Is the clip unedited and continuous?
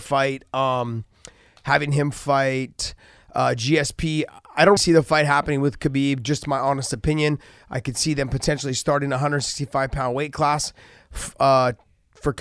no; 1 cut; at 4.8 s

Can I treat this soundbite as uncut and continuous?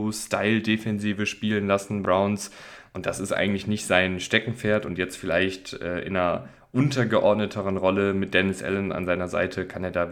no; 1 cut; at 2.0 s

